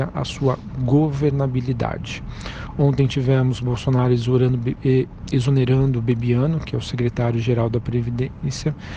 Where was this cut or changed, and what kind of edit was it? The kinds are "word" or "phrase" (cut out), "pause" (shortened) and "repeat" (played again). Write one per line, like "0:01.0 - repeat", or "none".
none